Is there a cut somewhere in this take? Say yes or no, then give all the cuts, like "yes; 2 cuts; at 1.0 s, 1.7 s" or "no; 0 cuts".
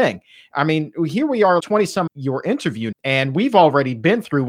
yes; 3 cuts; at 1.6 s, 2.1 s, 2.9 s